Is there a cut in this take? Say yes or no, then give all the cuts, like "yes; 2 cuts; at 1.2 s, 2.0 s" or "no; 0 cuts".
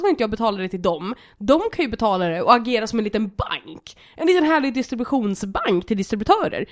no; 0 cuts